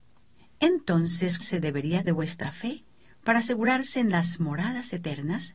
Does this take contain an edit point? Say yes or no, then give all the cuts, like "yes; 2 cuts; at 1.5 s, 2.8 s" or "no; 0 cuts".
yes; 2 cuts; at 1.4 s, 2.1 s